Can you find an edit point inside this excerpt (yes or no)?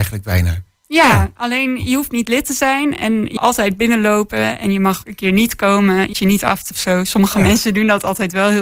yes